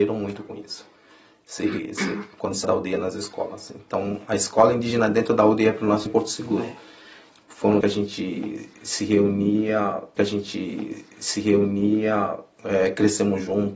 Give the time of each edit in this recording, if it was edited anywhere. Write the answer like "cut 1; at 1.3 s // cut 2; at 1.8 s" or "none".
cut 1; at 2.3 s // cut 2; at 2.6 s // cut 3; at 6.1 s // cut 4; at 7.8 s // cut 5; at 10.2 s